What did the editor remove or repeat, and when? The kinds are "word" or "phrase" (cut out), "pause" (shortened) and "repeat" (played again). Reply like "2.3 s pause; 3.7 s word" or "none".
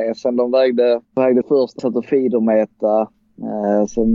1.0 s pause; 1.4 s phrase; 1.8 s word